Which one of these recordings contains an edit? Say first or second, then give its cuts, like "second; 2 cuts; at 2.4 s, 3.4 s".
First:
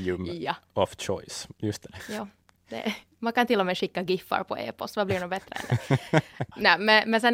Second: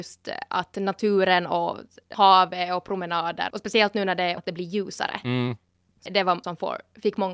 second; 5 cuts; at 2.1 s, 3.5 s, 4.4 s, 6.1 s, 6.4 s